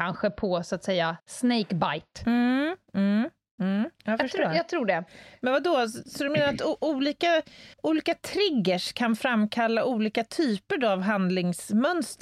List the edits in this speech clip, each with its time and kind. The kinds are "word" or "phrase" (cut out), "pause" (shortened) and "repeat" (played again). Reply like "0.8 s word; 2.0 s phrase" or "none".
1.2 s pause; 3.9 s pause; 7.7 s pause